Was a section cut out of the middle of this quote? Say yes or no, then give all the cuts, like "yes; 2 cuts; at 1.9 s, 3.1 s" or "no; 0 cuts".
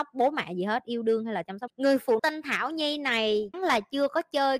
yes; 3 cuts; at 1.7 s, 2.2 s, 3.5 s